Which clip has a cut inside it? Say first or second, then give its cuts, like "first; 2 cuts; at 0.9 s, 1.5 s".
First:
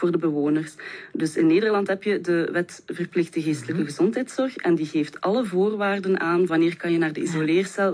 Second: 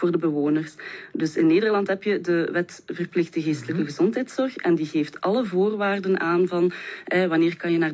first; 1 cut; at 6.5 s